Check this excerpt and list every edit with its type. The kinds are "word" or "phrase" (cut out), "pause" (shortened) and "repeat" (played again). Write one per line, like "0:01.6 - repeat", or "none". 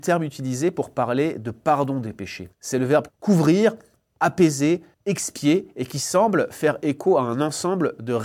0:02.5 - pause
0:03.1 - phrase
0:04.9 - pause